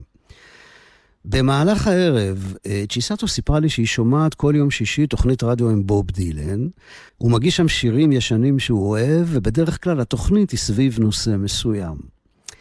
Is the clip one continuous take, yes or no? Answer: no